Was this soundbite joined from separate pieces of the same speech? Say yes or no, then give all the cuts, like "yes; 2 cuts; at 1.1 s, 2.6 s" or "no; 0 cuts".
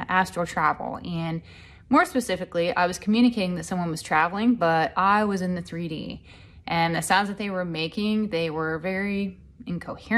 no; 0 cuts